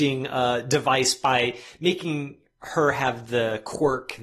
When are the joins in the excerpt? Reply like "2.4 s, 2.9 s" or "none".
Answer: none

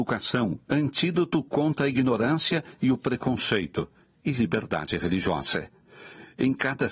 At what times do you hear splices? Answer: none

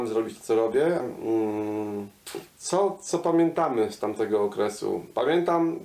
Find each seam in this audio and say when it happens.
1.0 s, 2.5 s

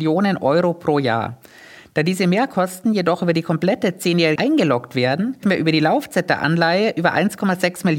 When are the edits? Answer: 4.4 s, 5.4 s

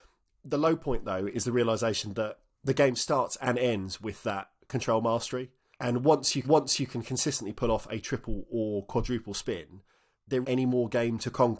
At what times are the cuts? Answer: 5.7 s, 6.4 s, 10.4 s

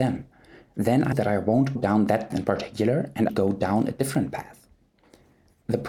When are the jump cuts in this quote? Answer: 1.1 s, 1.8 s, 2.3 s, 3.3 s

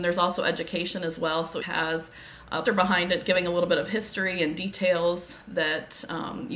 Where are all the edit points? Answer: 1.6 s, 2.6 s

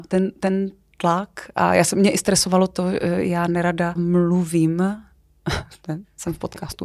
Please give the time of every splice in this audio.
4.0 s

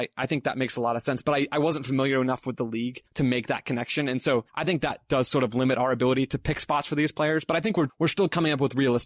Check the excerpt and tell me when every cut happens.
3.1 s, 4.5 s

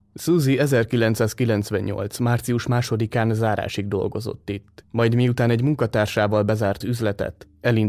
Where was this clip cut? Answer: 6.8 s

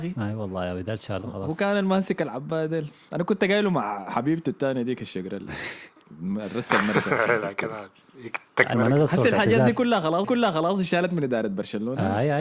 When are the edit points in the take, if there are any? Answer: 8.7 s, 10.2 s

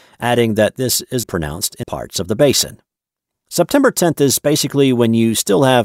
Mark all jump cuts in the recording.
1.2 s, 1.8 s

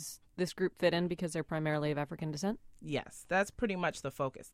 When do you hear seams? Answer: none

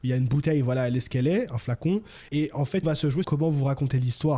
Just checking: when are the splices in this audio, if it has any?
2.3 s, 2.8 s, 3.2 s

